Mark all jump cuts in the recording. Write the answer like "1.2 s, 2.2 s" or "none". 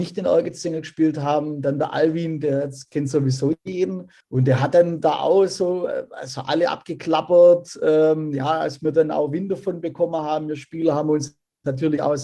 4.2 s